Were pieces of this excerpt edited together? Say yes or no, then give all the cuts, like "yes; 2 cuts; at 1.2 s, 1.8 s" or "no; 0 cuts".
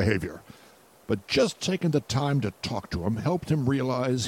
no; 0 cuts